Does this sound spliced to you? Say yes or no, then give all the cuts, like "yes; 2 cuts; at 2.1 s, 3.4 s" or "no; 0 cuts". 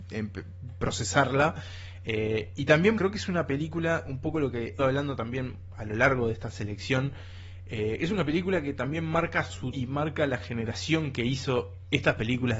yes; 3 cuts; at 3.0 s, 4.8 s, 9.7 s